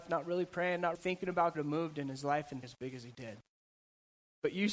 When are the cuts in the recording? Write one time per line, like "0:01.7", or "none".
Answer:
0:00.9
0:01.5
0:02.6